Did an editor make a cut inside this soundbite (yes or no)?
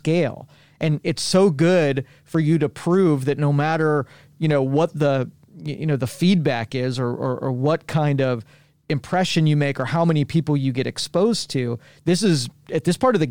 no